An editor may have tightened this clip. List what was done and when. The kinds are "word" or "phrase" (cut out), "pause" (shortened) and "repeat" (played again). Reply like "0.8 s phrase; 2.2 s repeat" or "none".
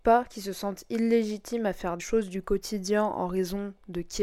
2.0 s word